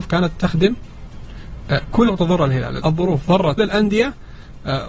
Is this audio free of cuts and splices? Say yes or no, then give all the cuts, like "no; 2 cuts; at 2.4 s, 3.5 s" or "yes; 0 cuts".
no; 3 cuts; at 2.1 s, 2.8 s, 3.6 s